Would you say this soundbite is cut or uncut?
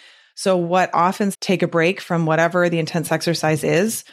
cut